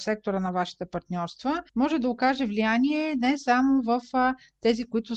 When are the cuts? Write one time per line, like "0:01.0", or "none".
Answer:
0:01.7